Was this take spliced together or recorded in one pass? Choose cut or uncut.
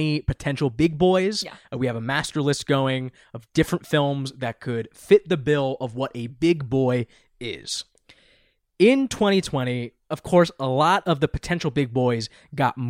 uncut